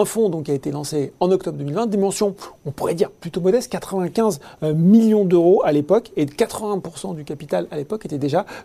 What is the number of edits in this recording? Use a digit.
0